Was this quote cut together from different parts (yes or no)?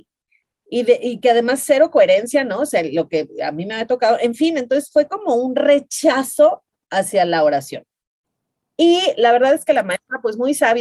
no